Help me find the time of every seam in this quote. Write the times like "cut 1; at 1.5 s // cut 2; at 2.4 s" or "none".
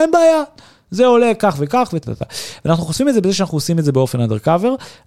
cut 1; at 2.0 s